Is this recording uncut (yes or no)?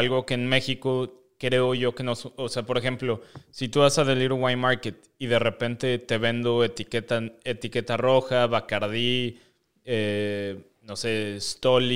yes